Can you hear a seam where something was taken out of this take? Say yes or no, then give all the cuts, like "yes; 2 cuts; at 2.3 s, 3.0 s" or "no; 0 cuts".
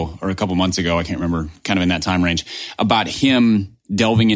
yes; 1 cut; at 1.6 s